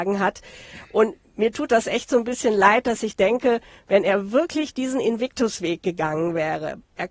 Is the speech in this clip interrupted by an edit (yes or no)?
no